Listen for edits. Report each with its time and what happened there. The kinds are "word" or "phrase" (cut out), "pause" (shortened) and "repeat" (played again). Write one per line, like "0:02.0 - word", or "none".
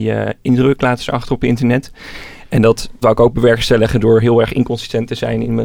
none

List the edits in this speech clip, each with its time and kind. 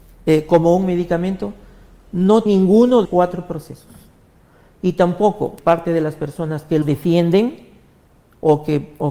0:02.5 - word
0:03.0 - word
0:05.6 - word
0:06.8 - word

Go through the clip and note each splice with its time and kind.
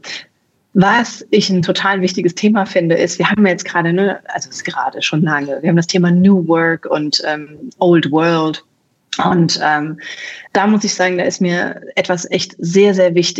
0:10.5 - pause

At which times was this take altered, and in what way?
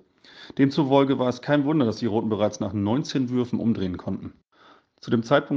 none

